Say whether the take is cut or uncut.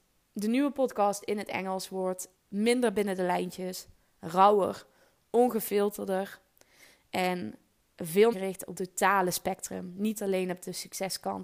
cut